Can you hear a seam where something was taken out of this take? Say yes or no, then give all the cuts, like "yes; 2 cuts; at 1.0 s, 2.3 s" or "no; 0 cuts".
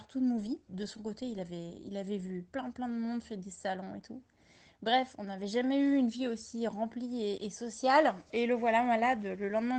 no; 0 cuts